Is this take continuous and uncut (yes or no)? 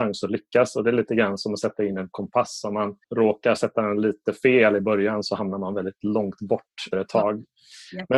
no